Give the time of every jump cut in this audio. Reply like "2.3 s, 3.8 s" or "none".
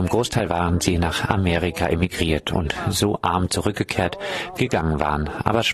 4.6 s